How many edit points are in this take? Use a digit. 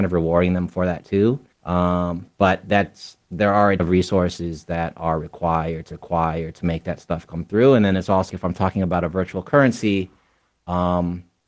5